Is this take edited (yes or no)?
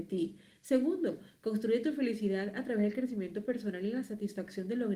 no